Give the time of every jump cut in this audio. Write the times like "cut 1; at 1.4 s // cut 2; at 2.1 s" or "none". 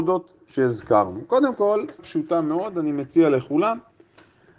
cut 1; at 2.0 s